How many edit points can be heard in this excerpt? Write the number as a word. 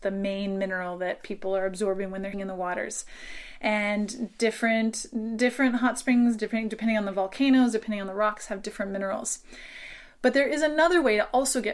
one